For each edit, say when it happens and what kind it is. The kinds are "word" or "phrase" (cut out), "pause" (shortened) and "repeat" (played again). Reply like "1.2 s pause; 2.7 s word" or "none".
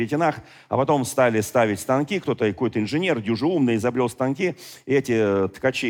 none